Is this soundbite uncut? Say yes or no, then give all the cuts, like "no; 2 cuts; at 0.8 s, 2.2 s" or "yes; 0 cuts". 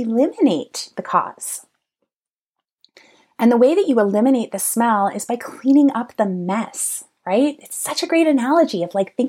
yes; 0 cuts